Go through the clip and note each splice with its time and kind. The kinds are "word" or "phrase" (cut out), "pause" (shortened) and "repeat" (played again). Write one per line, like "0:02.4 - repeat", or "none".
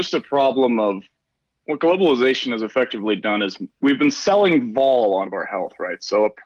0:03.7 - pause
0:05.3 - word